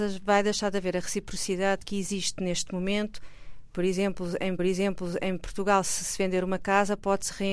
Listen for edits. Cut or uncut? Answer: cut